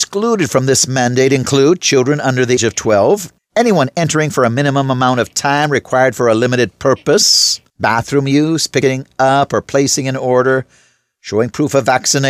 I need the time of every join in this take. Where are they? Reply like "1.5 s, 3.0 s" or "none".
2.6 s, 3.4 s, 7.7 s